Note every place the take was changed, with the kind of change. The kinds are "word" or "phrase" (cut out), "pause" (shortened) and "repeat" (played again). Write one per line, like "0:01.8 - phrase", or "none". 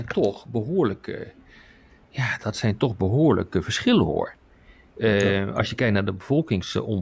none